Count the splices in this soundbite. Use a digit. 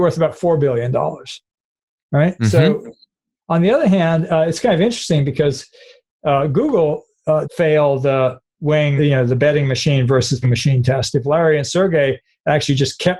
3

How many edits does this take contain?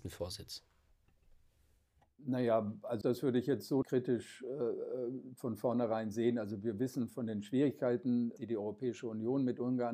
4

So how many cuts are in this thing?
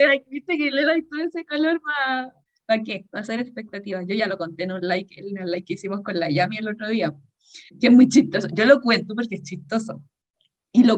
2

